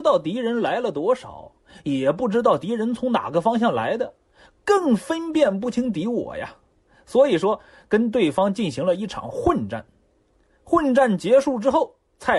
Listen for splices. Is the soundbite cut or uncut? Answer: uncut